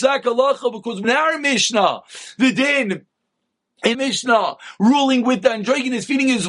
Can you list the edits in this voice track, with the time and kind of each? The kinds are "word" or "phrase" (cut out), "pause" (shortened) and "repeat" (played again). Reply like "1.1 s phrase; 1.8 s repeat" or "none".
1.0 s phrase; 3.9 s word